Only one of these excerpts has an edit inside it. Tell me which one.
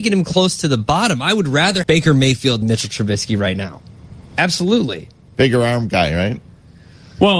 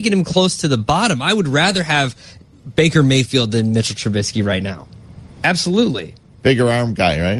first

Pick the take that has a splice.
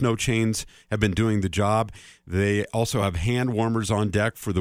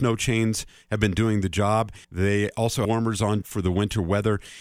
second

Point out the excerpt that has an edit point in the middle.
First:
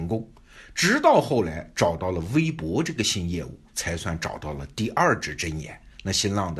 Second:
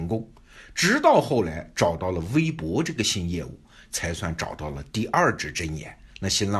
first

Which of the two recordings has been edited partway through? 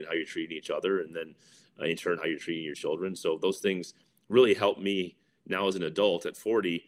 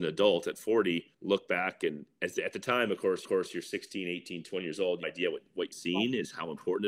second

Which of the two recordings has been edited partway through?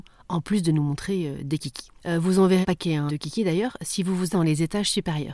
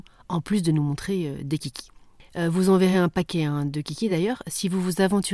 first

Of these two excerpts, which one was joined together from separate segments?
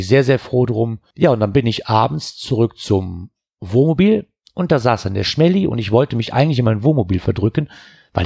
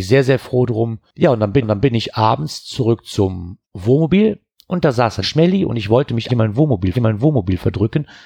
second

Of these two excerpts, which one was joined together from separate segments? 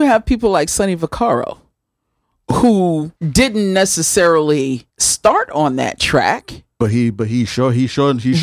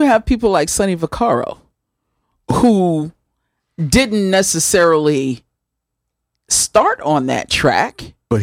first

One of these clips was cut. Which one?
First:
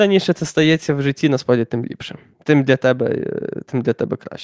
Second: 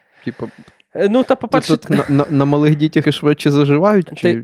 second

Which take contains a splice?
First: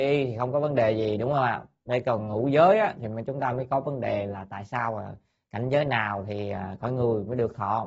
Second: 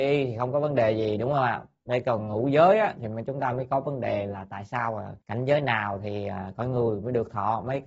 second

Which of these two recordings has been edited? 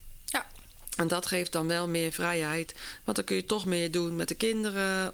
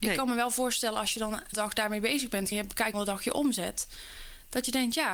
second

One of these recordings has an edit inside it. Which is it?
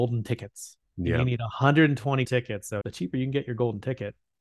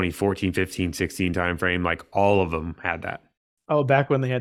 first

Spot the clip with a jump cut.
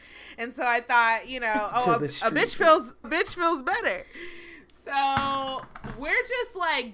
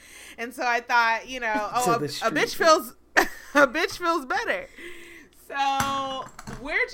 first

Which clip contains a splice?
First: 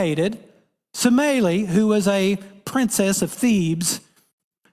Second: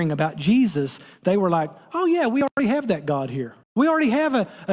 second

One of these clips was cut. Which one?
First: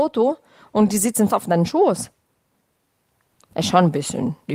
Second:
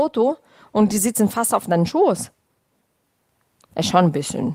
first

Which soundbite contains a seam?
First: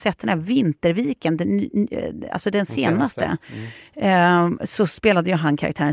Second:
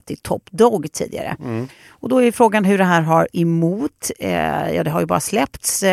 second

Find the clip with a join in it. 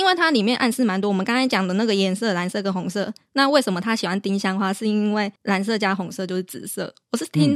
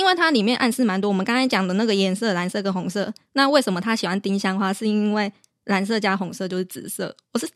first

